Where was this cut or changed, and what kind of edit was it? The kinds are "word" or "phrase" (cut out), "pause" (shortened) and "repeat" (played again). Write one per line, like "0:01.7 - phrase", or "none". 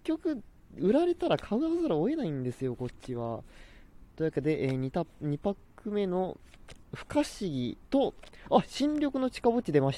0:04.1 - pause
0:06.8 - pause
0:07.8 - pause